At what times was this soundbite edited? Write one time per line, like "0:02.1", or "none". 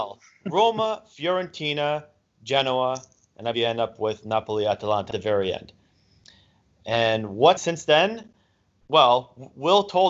0:03.5
0:05.1
0:07.6